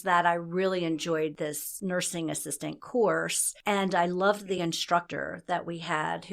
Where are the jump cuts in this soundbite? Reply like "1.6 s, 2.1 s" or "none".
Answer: none